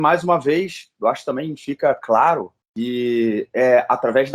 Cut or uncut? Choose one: uncut